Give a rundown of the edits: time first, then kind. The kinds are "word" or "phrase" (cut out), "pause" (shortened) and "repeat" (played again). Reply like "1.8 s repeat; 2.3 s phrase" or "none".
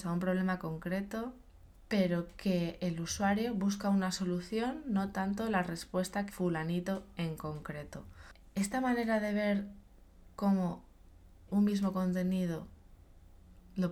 6.3 s phrase; 11.5 s word